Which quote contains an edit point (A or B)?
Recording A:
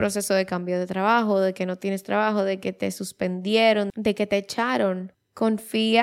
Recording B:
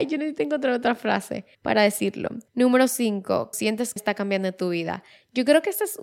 B